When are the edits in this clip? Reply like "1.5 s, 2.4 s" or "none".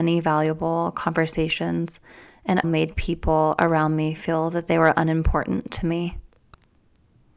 2.6 s